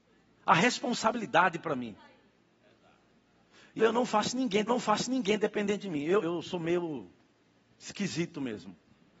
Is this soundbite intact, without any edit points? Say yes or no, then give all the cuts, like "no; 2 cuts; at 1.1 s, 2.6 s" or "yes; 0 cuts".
no; 3 cuts; at 3.8 s, 4.7 s, 6.2 s